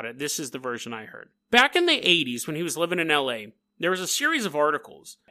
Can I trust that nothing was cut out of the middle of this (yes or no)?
no